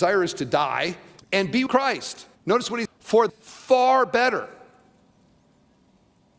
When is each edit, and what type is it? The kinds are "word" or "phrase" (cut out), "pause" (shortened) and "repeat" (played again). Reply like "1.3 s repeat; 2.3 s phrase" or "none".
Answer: 1.2 s pause; 1.7 s word; 2.3 s pause; 2.9 s word; 3.3 s phrase